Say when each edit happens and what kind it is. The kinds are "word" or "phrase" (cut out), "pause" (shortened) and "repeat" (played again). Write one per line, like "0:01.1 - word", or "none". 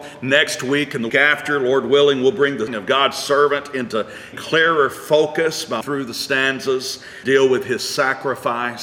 0:01.1 - word
0:02.7 - word
0:04.3 - word
0:05.8 - word
0:07.2 - word